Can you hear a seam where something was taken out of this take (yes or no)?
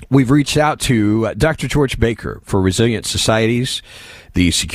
yes